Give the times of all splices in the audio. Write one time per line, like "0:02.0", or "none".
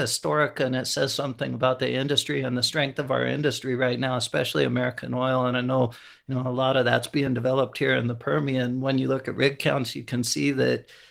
none